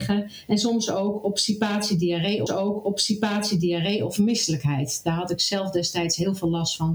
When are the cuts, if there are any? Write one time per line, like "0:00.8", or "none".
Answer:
0:02.5